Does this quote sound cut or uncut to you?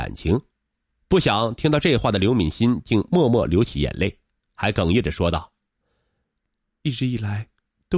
uncut